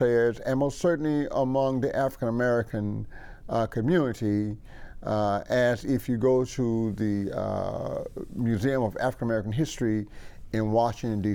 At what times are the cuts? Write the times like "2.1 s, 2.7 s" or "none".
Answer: none